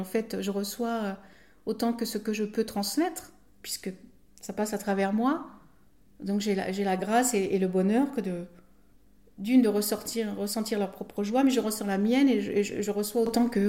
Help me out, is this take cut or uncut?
uncut